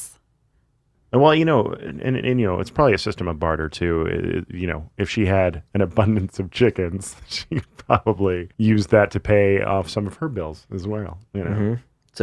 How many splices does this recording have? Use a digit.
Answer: 1